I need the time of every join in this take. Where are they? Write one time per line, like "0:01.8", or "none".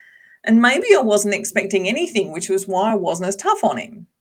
none